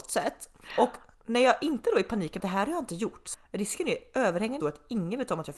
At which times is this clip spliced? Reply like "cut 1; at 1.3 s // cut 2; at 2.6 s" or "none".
cut 1; at 2.4 s // cut 2; at 3.3 s // cut 3; at 4.6 s